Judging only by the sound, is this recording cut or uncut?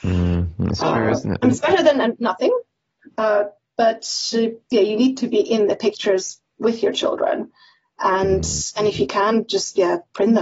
uncut